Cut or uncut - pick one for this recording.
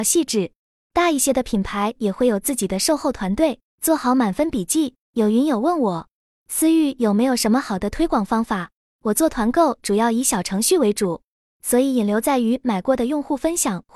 cut